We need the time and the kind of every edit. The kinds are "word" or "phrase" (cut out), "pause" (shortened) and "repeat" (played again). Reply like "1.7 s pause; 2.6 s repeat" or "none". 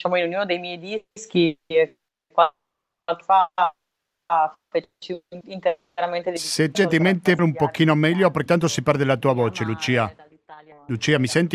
1.1 s pause; 3.2 s word; 5.4 s word; 6.7 s phrase; 7.4 s word; 8.5 s word

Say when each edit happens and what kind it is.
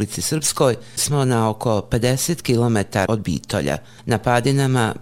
1.0 s word; 3.1 s word

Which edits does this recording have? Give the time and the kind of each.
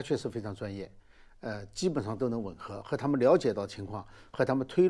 none

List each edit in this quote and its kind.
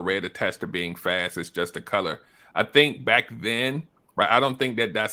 none

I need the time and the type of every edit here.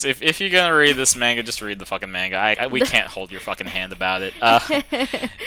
2.5 s word

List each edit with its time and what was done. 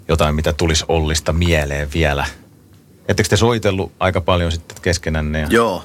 none

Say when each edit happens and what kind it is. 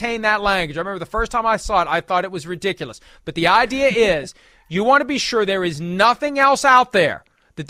none

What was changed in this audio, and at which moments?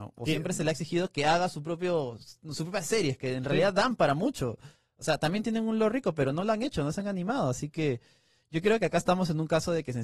none

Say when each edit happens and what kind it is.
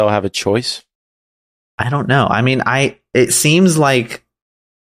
none

